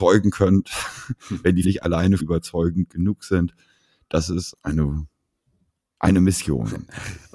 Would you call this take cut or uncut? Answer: cut